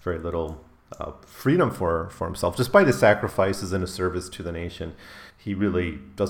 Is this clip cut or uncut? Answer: cut